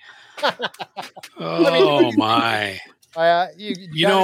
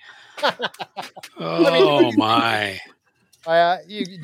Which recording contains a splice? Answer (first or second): first